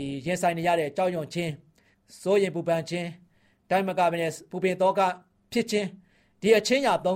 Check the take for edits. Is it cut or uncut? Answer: uncut